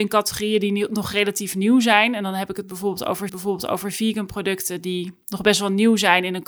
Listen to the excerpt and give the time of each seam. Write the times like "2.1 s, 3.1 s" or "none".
3.3 s